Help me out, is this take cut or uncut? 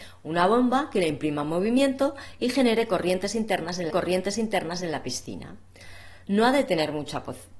cut